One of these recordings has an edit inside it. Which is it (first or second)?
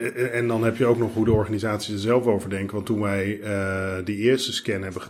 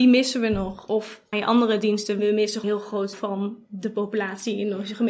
second